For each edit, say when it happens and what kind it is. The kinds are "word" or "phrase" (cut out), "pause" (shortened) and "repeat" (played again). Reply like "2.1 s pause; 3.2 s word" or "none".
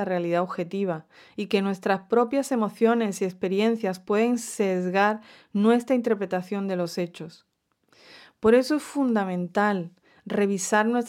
none